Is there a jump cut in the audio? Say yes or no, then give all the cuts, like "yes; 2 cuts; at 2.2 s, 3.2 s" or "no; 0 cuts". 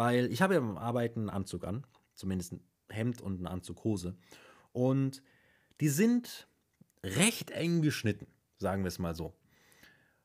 no; 0 cuts